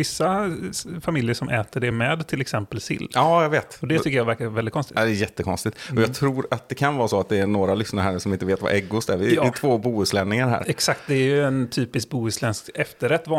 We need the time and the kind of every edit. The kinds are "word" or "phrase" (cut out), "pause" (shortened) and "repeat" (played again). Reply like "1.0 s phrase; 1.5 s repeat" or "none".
none

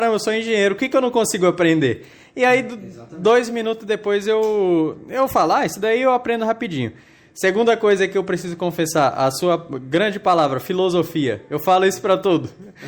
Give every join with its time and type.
none

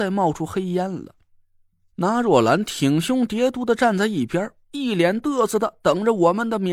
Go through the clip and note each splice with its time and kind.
none

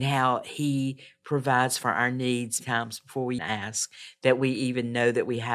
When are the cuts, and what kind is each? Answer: 2.6 s word; 3.4 s word

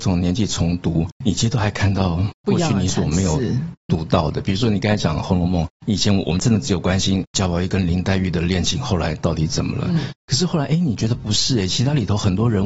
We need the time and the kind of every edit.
2.3 s pause

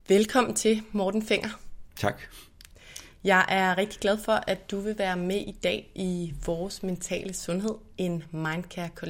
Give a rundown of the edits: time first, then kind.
none

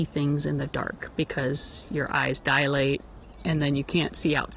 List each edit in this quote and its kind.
none

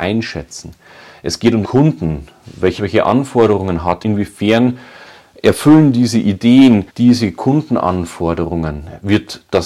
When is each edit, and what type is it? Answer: 1.6 s word; 2.8 s word; 4.0 s word; 6.9 s pause

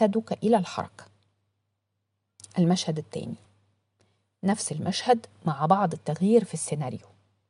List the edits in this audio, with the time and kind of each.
none

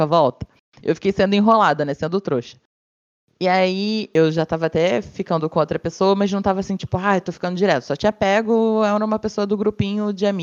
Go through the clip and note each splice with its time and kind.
none

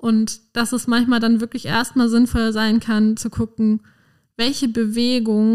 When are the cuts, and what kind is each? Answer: none

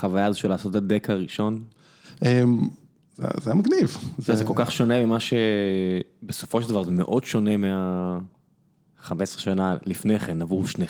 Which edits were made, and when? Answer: none

